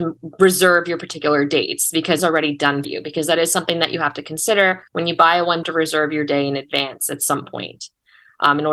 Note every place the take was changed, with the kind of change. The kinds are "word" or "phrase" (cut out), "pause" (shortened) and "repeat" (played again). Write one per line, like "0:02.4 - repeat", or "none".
0:02.2 - word
0:02.8 - word
0:04.9 - pause
0:05.6 - phrase